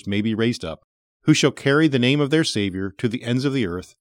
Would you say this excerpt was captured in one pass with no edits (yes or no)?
yes